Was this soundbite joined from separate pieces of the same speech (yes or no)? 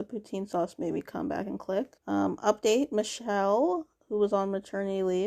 yes